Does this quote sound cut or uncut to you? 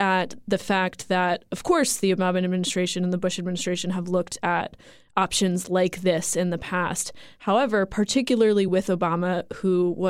uncut